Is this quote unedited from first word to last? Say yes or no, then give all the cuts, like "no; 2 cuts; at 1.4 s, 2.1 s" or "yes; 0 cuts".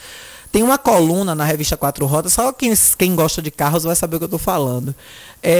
yes; 0 cuts